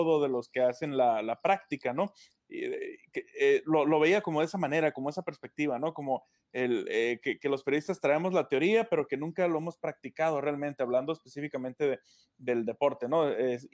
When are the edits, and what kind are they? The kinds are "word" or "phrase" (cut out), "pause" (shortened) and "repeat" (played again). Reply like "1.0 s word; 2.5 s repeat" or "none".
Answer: none